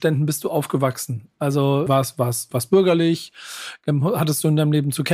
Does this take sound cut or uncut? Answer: cut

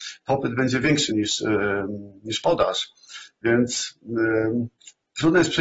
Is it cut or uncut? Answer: cut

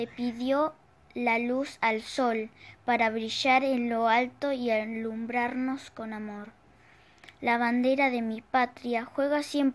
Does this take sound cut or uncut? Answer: uncut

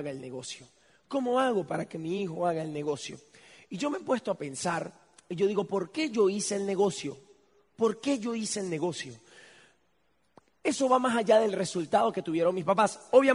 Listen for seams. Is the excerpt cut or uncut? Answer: uncut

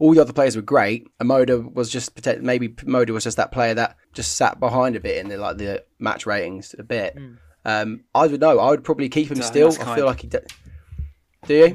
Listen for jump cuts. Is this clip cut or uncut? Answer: cut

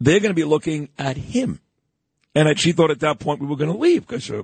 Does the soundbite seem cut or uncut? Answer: cut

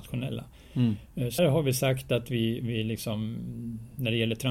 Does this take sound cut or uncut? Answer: cut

